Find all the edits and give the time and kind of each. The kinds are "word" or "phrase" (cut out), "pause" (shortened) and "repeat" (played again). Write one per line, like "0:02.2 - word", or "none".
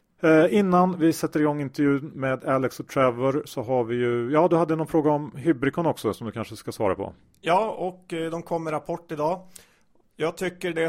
none